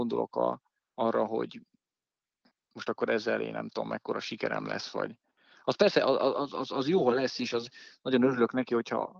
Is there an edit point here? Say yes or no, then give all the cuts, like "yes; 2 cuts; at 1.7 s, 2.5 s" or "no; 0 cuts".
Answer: no; 0 cuts